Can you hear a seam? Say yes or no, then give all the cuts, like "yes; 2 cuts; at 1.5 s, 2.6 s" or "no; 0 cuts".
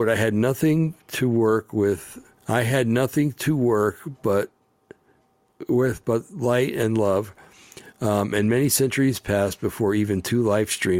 yes; 1 cut; at 2.4 s